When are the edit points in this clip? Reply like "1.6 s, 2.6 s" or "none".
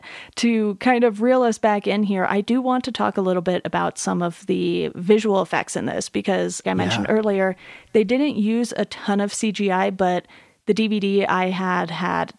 6.6 s